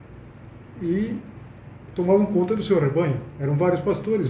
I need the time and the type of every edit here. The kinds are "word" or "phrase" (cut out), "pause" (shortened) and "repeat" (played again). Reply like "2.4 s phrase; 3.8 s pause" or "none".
none